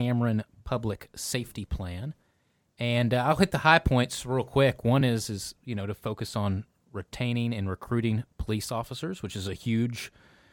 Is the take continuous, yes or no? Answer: yes